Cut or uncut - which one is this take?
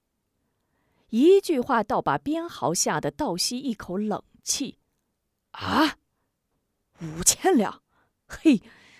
uncut